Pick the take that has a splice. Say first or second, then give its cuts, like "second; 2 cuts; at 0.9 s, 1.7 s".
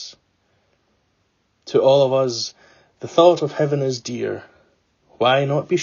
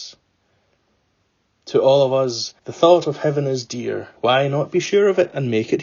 second; 2 cuts; at 2.6 s, 4.2 s